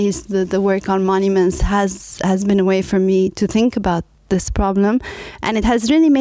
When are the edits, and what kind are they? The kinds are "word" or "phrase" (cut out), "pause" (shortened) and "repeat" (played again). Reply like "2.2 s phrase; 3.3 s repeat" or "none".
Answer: none